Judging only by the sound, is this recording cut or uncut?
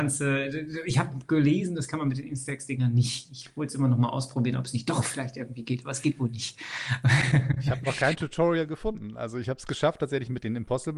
uncut